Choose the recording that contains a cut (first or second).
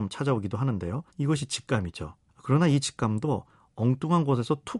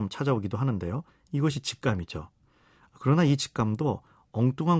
first